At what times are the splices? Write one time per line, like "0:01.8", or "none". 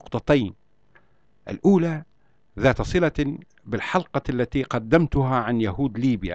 none